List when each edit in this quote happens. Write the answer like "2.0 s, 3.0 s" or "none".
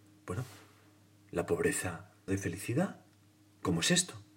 2.3 s